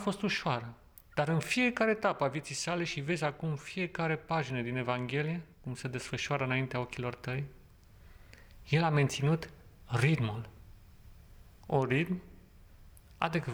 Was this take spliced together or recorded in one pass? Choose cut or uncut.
cut